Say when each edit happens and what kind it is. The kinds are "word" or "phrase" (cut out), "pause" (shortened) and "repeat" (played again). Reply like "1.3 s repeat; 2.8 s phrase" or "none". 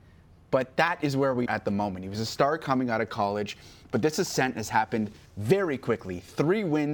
1.5 s word; 5.3 s pause